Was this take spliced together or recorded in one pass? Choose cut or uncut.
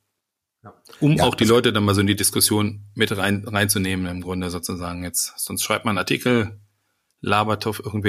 uncut